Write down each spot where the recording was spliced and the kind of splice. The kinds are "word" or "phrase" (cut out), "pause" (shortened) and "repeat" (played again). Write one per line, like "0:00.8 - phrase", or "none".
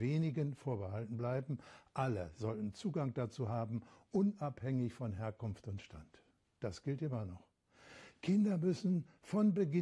none